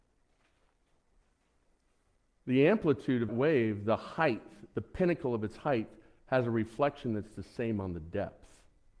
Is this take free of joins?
no; 1 cut; at 3.3 s

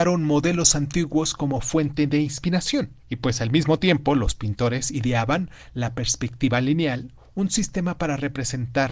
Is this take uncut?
no; 1 cut; at 3.0 s

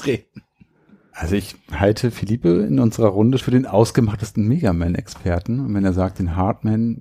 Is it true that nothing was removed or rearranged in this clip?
no; 1 cut; at 3.4 s

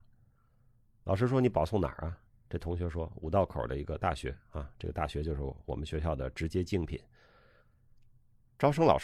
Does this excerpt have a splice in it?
no; 0 cuts

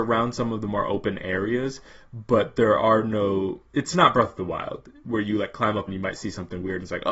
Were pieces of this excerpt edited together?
yes; 1 cut; at 5.9 s

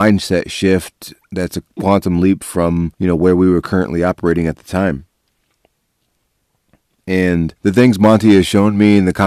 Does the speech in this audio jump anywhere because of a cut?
yes; 2 cuts; at 2.9 s, 7.6 s

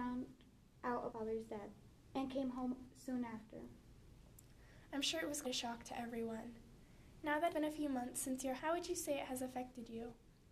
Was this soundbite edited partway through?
yes; 4 cuts; at 1.1 s, 5.4 s, 7.5 s, 8.6 s

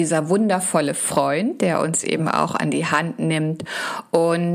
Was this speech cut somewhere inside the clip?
no; 0 cuts

